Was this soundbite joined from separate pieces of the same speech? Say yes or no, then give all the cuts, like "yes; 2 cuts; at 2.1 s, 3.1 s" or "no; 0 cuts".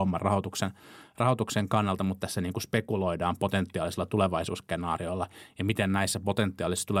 no; 0 cuts